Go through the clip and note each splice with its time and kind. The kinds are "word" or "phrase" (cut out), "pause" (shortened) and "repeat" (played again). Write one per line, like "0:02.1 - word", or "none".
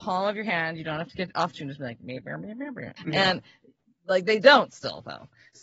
0:01.5 - phrase
0:03.0 - pause